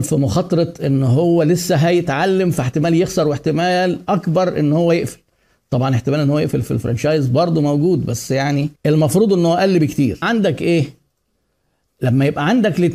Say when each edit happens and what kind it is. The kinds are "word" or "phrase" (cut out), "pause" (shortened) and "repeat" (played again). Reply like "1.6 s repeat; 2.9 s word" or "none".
8.8 s pause; 10.2 s word

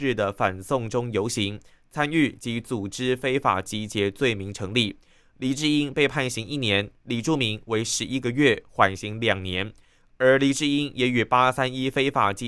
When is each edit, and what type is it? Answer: none

